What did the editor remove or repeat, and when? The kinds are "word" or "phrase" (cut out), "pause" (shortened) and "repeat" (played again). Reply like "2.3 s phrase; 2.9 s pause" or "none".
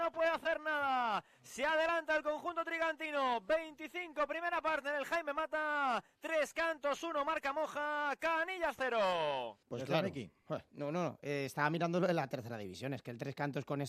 9.6 s pause